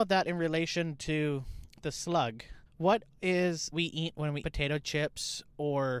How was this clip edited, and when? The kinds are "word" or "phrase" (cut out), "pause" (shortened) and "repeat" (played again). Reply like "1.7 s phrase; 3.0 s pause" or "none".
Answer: 2.7 s pause; 3.7 s phrase; 4.4 s word